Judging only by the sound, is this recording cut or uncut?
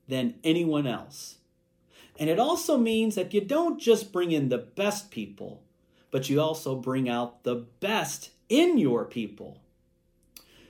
uncut